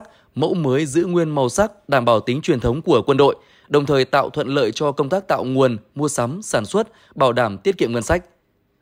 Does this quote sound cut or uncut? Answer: uncut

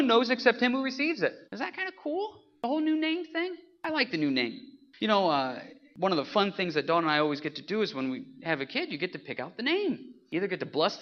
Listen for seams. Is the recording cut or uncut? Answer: cut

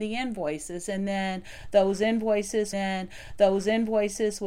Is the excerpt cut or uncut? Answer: cut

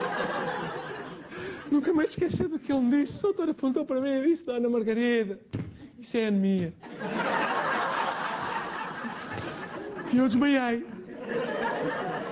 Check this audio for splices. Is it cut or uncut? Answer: uncut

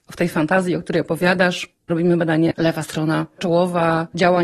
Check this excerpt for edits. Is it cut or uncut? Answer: cut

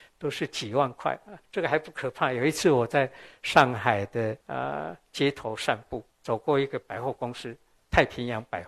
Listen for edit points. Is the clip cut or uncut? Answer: cut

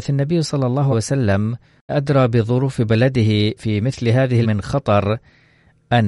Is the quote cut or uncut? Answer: cut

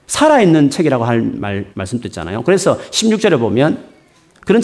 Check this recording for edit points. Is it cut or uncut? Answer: cut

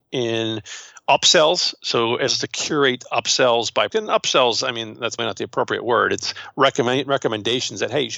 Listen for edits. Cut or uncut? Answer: cut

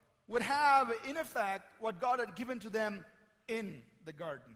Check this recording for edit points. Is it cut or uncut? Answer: uncut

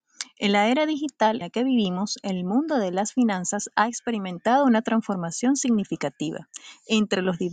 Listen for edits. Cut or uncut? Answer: cut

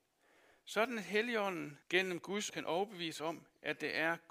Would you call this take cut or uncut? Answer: cut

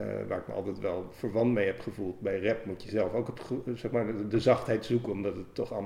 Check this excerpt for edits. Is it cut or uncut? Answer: uncut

